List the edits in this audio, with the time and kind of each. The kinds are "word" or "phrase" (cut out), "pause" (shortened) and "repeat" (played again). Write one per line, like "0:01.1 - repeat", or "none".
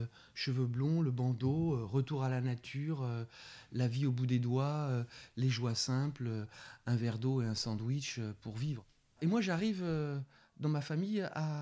none

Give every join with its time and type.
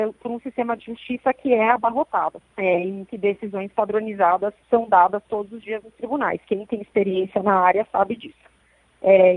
0:02.5 - pause
0:04.6 - pause

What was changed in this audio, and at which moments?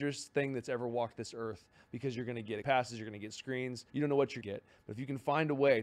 0:02.6 - word
0:03.9 - pause
0:04.4 - word

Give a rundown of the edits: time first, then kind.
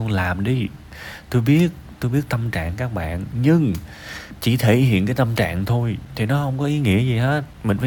none

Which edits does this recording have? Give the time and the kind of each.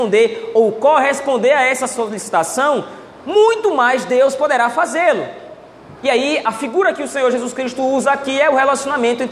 none

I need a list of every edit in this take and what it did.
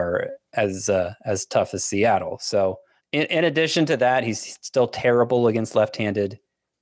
0:03.0 - pause

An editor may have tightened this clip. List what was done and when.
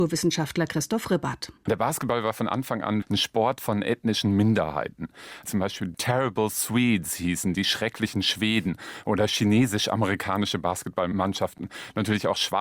none

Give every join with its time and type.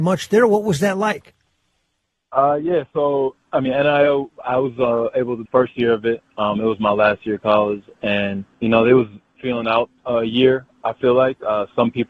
0:05.5 - phrase
0:08.5 - pause
0:09.4 - word
0:10.0 - pause

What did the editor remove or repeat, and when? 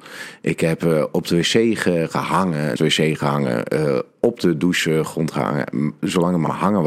0:02.8 - word

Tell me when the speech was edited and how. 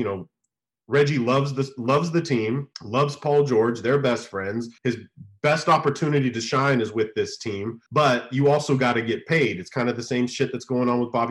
0:02.7 - pause
0:04.8 - pause
0:07.9 - pause

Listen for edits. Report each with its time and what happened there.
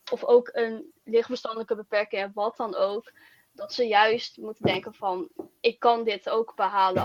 none

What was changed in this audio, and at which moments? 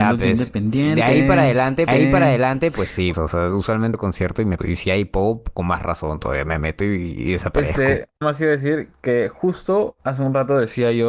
0:01.9 - repeat
0:03.1 - word
0:03.9 - word
0:04.6 - word
0:08.2 - word
0:10.0 - pause

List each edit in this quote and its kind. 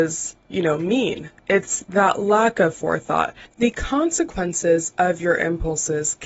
none

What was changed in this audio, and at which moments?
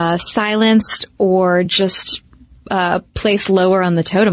none

